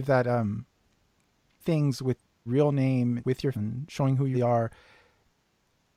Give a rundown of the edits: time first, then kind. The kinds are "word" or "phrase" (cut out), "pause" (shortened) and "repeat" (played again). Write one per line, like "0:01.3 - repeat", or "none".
0:01.6 - word
0:02.5 - word
0:03.2 - word
0:03.5 - word
0:04.3 - word